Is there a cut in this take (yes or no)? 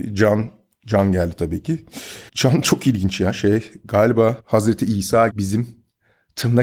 yes